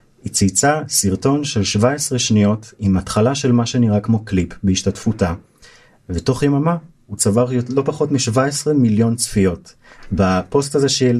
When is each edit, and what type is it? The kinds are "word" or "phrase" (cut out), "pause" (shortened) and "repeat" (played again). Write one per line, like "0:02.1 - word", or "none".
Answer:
none